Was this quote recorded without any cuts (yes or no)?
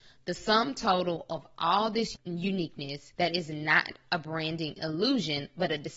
no